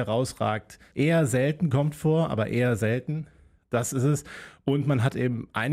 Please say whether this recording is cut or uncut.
cut